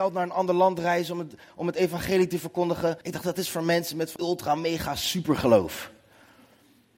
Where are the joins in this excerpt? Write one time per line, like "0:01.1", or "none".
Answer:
0:03.0
0:04.2